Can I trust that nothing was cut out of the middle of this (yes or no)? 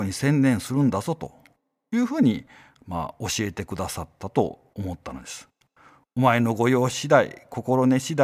yes